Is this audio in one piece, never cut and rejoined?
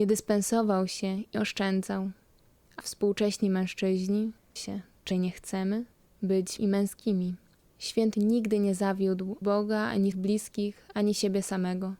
no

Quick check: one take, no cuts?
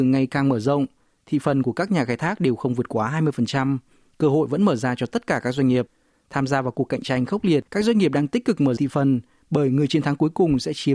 no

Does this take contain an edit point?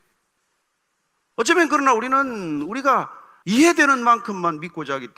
no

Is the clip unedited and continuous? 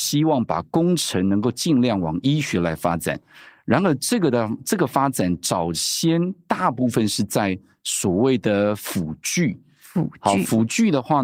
yes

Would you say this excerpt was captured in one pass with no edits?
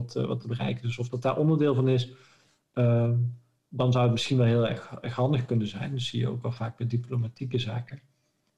yes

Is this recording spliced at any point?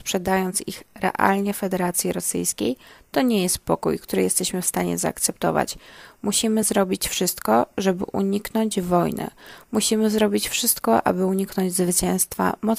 no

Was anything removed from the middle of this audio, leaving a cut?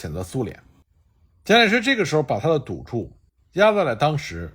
no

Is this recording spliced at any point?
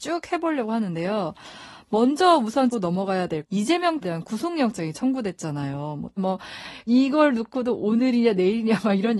yes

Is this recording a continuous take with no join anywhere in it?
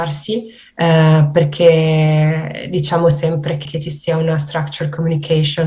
no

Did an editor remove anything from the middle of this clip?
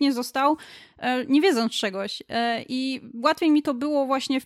no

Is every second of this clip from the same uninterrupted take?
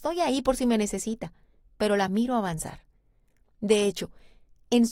yes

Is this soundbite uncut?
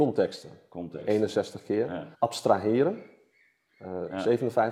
no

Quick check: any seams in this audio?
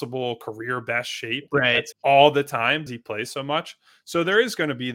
yes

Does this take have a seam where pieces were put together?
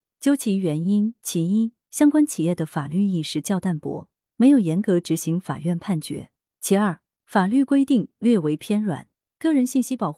no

